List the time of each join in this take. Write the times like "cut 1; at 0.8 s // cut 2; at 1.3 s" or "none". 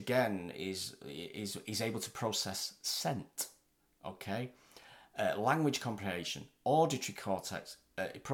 none

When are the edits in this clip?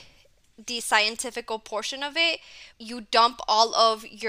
cut 1; at 2.7 s

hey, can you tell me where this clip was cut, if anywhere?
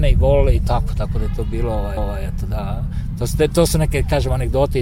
cut 1; at 2.0 s

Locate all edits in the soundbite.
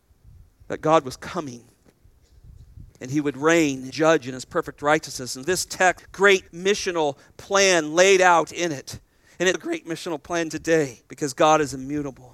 cut 1; at 2.9 s // cut 2; at 3.9 s // cut 3; at 5.4 s // cut 4; at 6.0 s // cut 5; at 6.5 s // cut 6; at 9.5 s // cut 7; at 11.1 s

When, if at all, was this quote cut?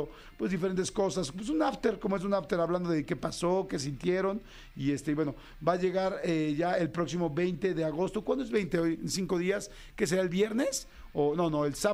none

